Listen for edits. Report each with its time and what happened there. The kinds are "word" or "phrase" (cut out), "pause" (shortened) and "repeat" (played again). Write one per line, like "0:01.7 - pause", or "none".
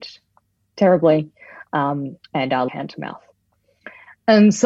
0:02.2 - pause
0:02.7 - word